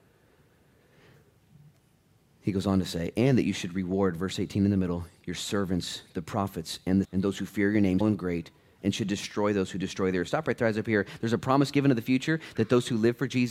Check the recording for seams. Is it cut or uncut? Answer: cut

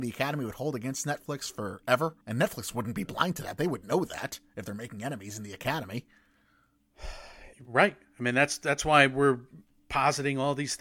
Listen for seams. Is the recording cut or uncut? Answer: cut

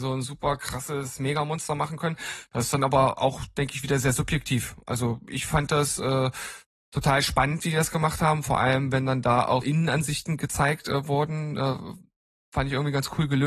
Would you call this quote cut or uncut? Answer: cut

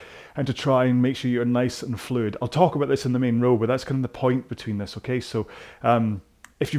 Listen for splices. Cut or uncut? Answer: uncut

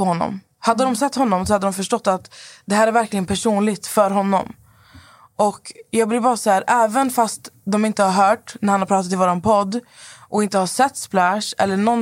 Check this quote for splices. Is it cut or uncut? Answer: uncut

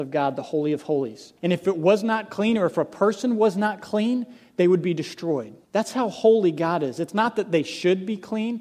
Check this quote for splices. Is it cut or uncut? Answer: cut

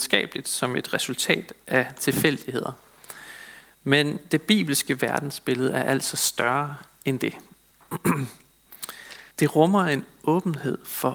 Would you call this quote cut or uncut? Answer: cut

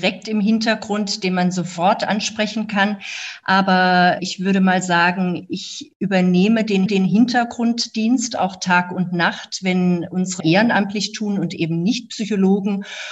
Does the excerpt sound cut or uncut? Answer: cut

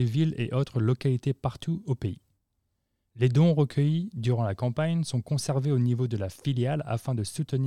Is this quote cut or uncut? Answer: uncut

